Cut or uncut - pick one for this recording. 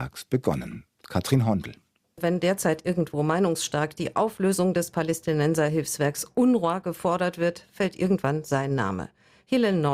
uncut